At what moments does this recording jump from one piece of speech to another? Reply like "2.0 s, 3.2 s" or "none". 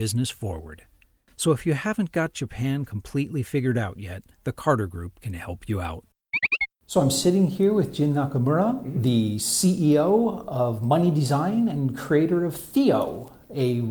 4.3 s, 6.7 s